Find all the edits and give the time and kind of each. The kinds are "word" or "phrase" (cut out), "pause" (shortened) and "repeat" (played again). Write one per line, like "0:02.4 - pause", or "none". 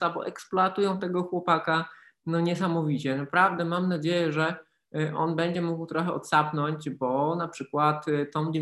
none